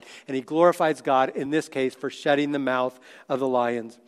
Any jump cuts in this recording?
no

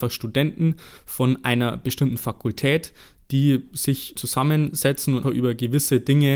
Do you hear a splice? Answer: yes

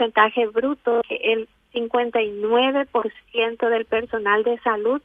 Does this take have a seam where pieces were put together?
yes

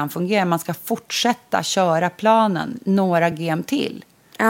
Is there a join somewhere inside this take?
no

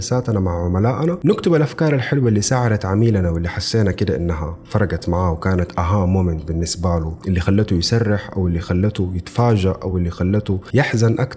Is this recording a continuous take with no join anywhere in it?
yes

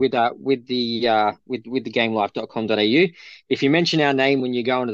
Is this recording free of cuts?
yes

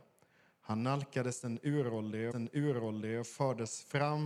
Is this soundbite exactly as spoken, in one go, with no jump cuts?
no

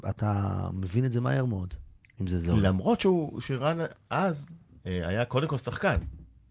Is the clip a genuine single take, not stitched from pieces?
yes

